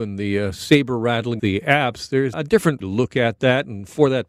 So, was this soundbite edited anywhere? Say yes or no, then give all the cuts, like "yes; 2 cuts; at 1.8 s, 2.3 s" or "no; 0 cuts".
yes; 3 cuts; at 1.4 s, 2.3 s, 2.8 s